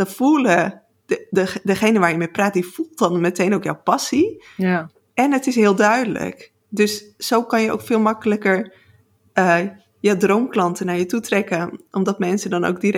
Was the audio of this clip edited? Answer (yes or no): no